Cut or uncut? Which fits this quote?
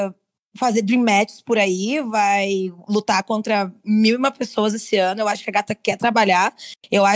uncut